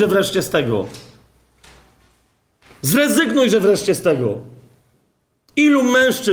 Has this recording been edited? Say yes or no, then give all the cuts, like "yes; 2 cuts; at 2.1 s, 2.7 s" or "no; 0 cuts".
no; 0 cuts